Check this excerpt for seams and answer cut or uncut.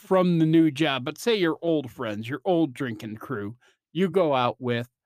uncut